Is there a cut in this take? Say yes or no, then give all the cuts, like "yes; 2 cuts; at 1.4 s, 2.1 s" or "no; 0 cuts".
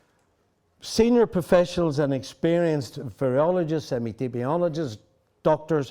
no; 0 cuts